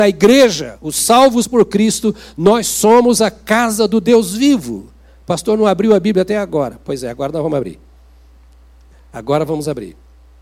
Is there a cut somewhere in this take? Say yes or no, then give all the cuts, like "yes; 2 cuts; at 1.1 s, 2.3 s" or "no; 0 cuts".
no; 0 cuts